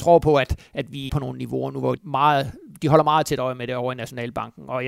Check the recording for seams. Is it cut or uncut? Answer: cut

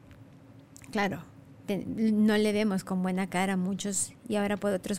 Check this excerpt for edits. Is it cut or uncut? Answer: uncut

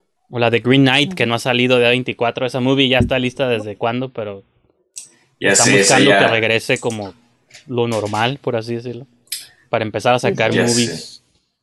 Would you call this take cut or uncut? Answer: uncut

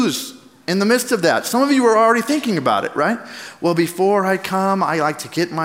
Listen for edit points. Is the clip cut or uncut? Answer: uncut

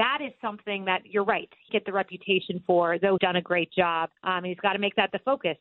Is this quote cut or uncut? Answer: cut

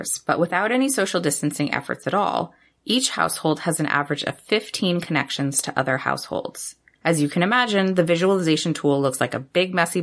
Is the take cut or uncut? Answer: uncut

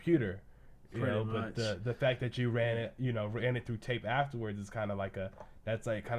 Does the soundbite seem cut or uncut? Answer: uncut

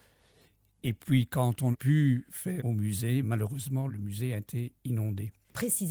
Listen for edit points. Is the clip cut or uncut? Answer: cut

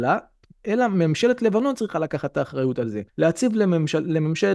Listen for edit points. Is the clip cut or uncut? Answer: cut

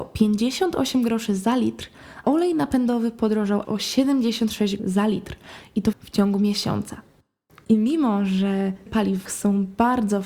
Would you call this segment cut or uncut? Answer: cut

